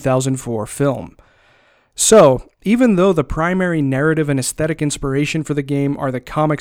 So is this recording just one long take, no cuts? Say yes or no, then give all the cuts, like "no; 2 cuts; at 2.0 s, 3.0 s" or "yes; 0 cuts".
yes; 0 cuts